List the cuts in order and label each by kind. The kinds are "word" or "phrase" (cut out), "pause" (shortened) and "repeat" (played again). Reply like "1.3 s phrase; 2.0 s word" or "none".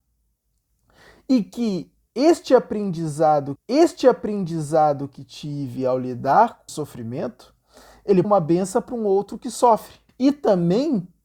3.6 s repeat; 6.7 s word; 8.2 s phrase; 10.1 s pause